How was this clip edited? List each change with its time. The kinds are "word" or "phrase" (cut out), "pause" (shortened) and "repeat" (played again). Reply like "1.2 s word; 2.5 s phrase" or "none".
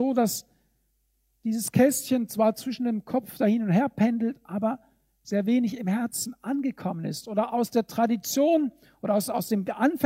none